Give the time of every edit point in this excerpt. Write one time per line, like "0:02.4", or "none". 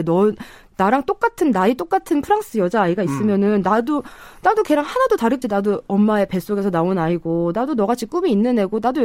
0:05.4